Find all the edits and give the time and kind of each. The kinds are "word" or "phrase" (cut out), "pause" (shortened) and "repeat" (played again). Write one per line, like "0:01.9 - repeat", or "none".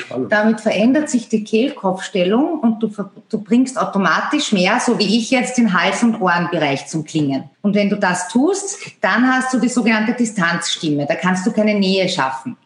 0:07.5 - pause